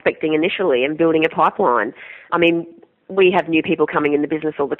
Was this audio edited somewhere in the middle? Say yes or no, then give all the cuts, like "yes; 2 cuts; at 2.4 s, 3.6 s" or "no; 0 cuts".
yes; 1 cut; at 2.3 s